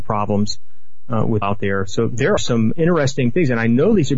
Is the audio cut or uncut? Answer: cut